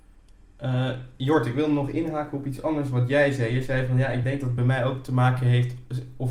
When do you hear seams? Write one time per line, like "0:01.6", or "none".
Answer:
none